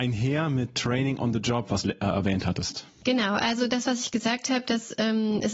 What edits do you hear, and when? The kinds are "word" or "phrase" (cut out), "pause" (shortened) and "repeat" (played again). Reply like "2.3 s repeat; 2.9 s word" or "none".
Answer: 1.8 s phrase